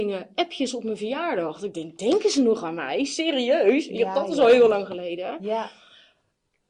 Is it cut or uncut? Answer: uncut